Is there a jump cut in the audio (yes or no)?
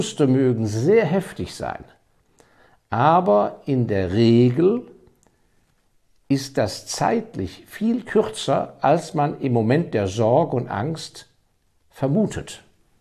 no